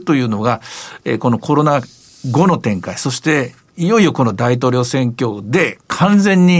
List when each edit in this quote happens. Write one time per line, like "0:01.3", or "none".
none